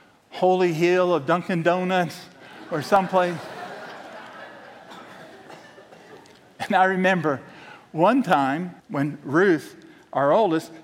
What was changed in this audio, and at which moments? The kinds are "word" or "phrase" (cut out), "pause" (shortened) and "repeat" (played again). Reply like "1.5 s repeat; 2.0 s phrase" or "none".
8.8 s pause